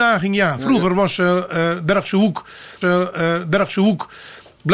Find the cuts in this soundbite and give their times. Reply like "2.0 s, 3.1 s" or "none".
2.8 s